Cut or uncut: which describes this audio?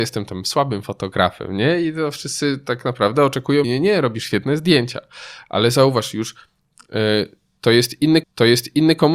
cut